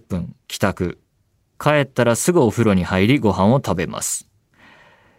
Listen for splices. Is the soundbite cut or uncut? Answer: uncut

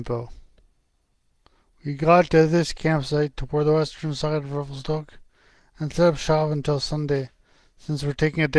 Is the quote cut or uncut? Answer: uncut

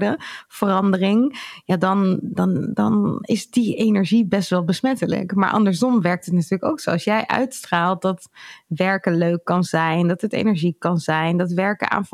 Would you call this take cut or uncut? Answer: uncut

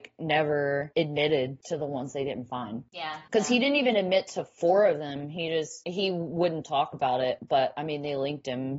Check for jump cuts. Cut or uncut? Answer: uncut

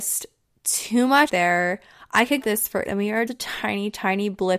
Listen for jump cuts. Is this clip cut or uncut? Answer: cut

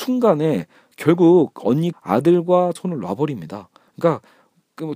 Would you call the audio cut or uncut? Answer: cut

